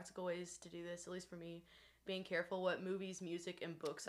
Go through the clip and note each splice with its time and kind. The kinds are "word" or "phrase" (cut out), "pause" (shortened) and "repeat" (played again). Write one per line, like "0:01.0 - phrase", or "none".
0:02.1 - word